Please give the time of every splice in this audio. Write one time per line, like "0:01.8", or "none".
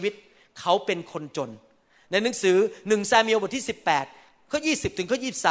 none